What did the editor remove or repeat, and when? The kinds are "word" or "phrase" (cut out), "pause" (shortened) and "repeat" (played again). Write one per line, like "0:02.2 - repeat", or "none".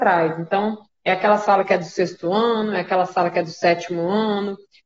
none